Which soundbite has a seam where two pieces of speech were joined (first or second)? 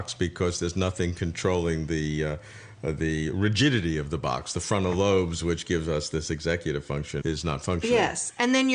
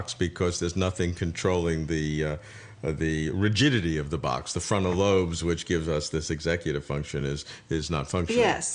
first